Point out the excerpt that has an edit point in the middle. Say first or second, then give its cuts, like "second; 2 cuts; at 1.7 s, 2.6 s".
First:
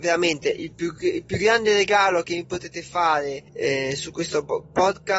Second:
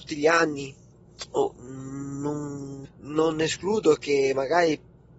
first; 1 cut; at 3.5 s